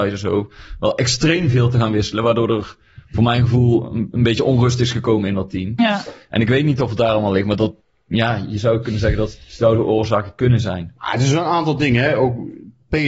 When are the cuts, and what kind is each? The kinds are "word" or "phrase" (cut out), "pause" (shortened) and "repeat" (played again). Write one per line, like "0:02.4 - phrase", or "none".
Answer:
0:07.8 - pause